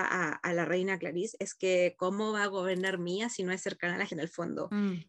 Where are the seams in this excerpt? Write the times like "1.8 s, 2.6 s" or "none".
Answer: 4.1 s